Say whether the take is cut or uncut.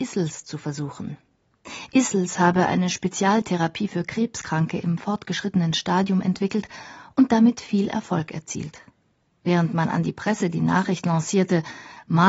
uncut